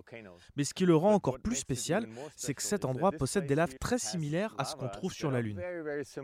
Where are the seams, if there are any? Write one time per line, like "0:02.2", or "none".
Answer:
0:03.8